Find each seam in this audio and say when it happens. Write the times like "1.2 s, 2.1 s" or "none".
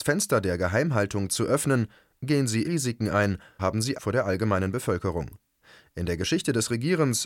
2.6 s, 3.6 s, 3.9 s